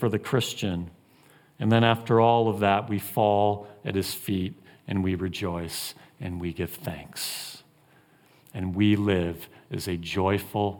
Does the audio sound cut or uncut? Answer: uncut